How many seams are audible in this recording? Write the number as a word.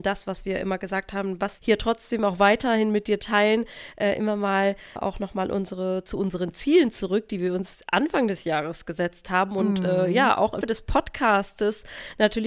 three